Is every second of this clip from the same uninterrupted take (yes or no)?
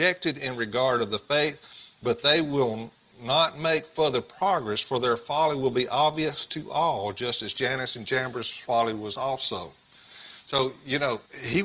yes